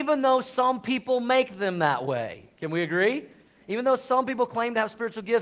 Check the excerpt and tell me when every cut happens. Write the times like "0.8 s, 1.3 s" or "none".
none